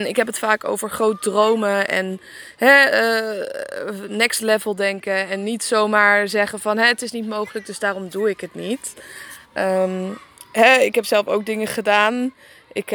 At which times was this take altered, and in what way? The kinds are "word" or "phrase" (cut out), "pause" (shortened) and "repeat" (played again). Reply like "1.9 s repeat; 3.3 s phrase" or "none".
9.4 s pause